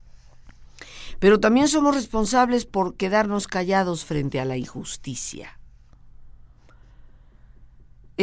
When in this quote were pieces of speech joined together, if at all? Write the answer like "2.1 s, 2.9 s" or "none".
none